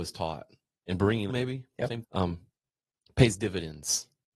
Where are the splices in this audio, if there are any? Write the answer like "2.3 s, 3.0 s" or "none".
1.3 s, 2.0 s